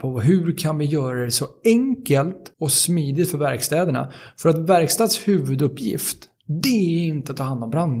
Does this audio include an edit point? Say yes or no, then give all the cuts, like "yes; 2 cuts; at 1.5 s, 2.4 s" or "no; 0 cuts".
yes; 1 cut; at 2.5 s